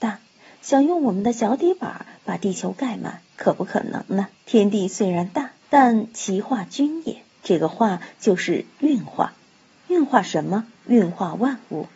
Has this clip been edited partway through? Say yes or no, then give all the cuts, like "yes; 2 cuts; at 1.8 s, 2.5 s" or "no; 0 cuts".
yes; 5 cuts; at 3.3 s, 4.3 s, 5.6 s, 7.3 s, 10.8 s